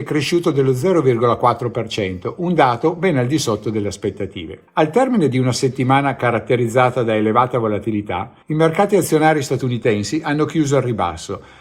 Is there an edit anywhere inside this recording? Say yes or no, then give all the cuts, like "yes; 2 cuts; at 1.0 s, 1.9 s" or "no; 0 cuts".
yes; 2 cuts; at 4.7 s, 8.4 s